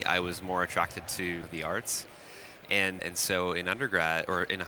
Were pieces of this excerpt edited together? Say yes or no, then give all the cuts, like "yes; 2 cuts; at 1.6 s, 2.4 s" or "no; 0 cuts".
yes; 2 cuts; at 1.4 s, 3.0 s